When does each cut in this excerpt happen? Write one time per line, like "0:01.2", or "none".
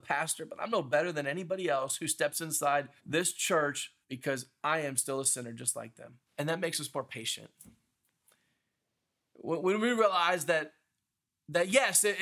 0:03.0
0:04.0
0:06.3